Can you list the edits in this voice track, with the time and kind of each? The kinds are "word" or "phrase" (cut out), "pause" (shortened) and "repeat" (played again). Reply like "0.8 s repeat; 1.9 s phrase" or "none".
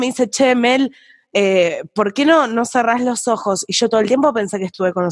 none